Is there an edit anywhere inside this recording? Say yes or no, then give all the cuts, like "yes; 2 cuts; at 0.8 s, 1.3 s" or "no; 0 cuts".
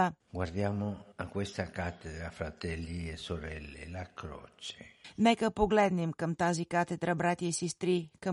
yes; 1 cut; at 1.1 s